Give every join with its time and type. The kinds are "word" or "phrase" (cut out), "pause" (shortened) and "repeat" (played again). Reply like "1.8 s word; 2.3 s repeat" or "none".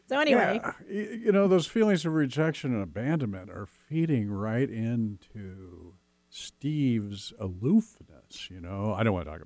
6.0 s pause

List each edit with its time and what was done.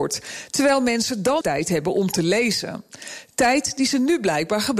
1.4 s word

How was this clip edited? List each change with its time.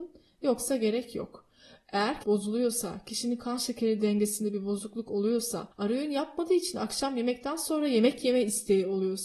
2.2 s phrase; 5.7 s pause

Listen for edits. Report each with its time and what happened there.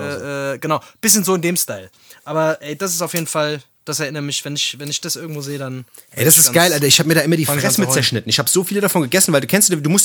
none

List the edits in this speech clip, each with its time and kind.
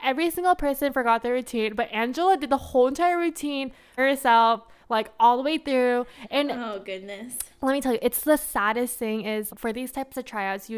4.0 s word; 9.5 s word

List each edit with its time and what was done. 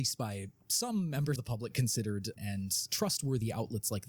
1.4 s word; 2.4 s word; 2.9 s word

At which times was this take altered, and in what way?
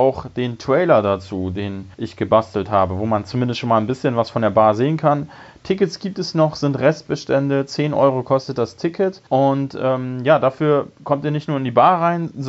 1.9 s pause; 9.3 s pause

